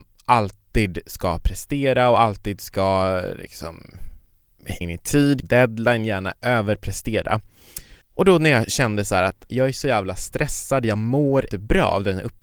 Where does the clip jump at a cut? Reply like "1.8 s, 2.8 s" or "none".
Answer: 4.8 s, 5.4 s, 8.0 s, 9.5 s, 11.5 s